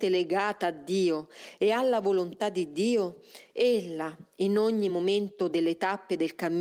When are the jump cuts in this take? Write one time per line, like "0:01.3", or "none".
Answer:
none